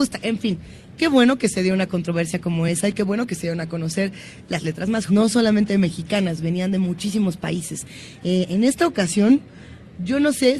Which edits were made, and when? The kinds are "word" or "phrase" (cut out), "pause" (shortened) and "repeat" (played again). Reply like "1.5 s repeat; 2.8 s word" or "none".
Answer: 5.1 s word

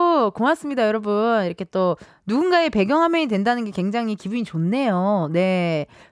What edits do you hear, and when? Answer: none

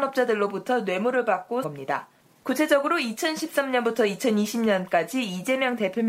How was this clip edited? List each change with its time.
1.6 s phrase

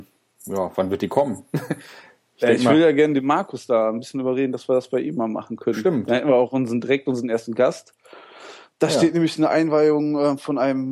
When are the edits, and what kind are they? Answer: none

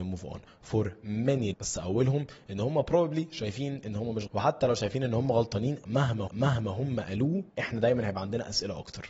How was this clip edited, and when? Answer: 1.5 s word; 4.3 s word; 6.3 s repeat; 7.5 s pause

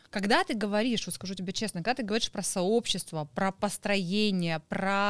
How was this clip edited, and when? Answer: none

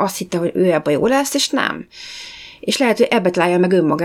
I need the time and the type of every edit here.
none

